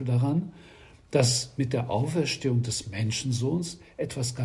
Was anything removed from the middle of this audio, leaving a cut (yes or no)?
no